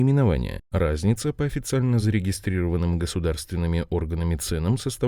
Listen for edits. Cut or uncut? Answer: uncut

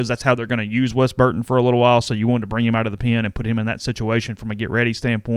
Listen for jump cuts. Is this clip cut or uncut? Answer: uncut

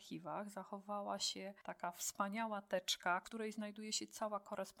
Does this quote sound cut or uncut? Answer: uncut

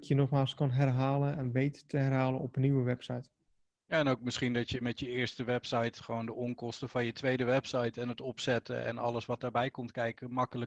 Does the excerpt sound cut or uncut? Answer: uncut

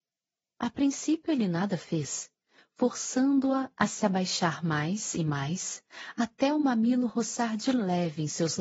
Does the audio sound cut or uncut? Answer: uncut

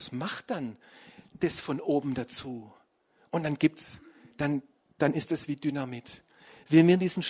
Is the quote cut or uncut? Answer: uncut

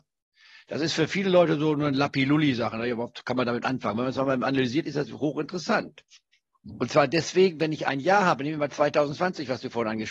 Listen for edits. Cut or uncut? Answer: uncut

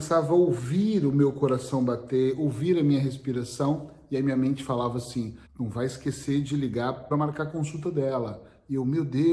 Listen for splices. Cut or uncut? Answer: cut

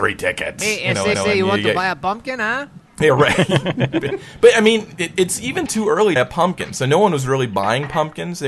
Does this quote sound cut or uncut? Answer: cut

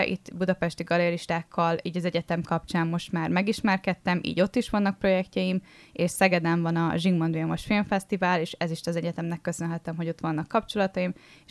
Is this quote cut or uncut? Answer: uncut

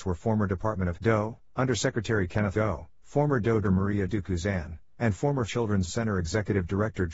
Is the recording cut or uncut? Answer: cut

